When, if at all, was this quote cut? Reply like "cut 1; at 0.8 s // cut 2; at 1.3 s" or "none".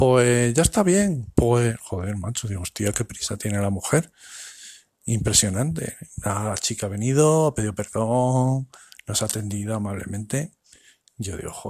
none